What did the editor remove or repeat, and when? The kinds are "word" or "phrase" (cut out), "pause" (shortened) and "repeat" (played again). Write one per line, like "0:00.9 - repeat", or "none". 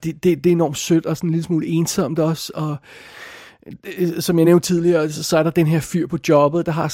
none